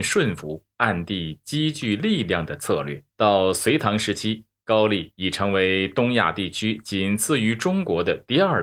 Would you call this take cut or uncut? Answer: cut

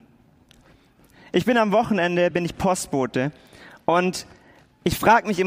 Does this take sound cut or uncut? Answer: uncut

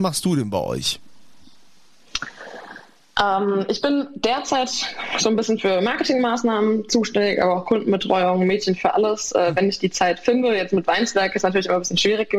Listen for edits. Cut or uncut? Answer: uncut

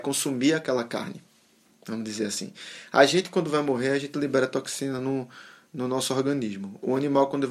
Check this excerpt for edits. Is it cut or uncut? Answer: uncut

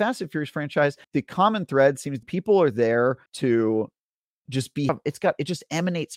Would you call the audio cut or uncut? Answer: cut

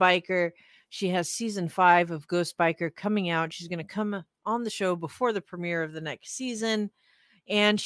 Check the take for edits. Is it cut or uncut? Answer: uncut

